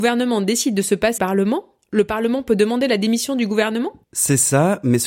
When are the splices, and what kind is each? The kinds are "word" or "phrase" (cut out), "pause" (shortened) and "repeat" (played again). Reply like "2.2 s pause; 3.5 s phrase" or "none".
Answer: 1.2 s word; 4.0 s pause